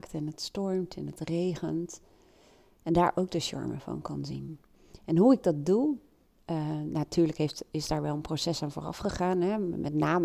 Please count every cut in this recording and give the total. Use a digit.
0